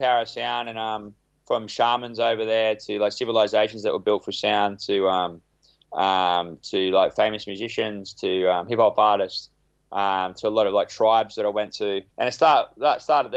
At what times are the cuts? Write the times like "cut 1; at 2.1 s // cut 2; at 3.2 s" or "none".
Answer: cut 1; at 12.1 s